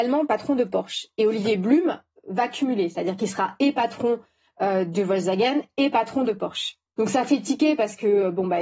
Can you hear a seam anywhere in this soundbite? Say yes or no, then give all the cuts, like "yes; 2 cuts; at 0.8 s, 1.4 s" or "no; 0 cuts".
no; 0 cuts